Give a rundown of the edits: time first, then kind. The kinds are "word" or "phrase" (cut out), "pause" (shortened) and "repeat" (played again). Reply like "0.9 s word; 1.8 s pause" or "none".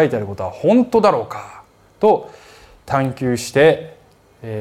none